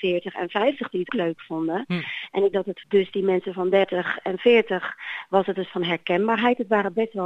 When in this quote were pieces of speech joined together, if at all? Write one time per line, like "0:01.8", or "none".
0:01.1
0:02.5
0:02.8
0:05.7